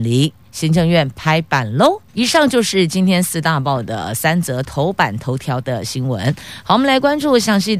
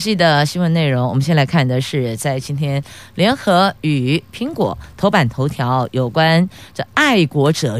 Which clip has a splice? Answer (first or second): first